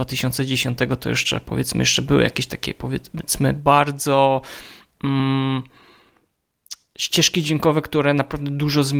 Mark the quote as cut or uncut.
uncut